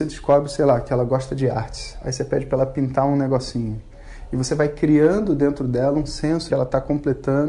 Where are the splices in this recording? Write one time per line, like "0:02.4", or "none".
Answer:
0:06.5